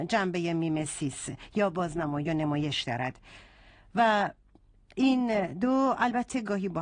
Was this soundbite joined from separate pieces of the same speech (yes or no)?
no